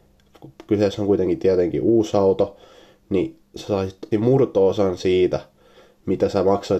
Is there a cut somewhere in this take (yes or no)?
yes